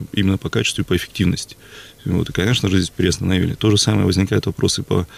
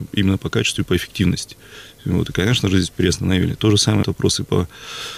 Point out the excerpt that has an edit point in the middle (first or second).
second